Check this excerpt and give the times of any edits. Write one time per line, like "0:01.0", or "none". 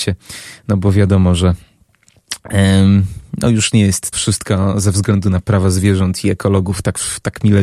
0:04.1

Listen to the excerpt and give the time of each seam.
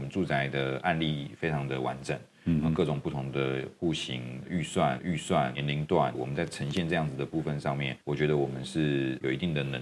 0:05.0
0:06.1
0:08.0

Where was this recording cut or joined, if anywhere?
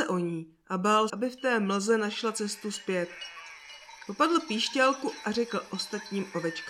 0:01.1

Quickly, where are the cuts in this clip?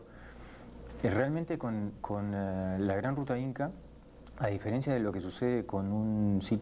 none

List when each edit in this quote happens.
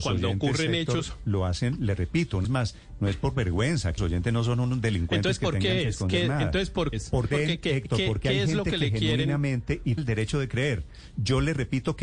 0:02.4
0:04.0
0:06.9
0:07.3
0:10.0

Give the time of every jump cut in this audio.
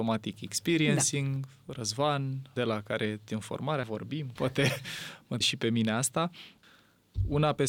0:02.6
0:03.3
0:03.8
0:04.4
0:05.4

